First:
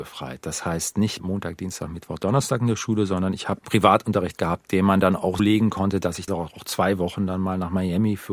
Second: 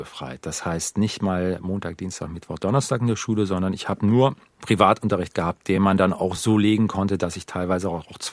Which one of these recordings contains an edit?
first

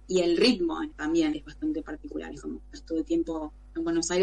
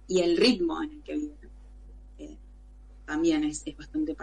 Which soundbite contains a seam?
first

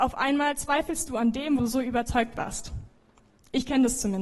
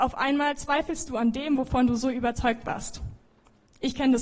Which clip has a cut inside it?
first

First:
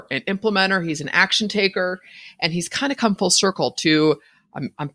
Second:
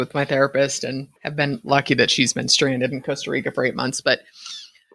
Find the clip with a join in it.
second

